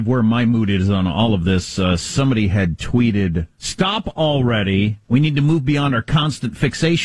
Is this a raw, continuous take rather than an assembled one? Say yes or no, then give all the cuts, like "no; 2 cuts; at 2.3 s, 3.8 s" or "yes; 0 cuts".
no; 2 cuts; at 3.5 s, 5.0 s